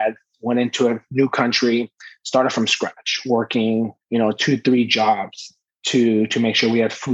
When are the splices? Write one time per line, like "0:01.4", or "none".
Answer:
0:04.0
0:05.7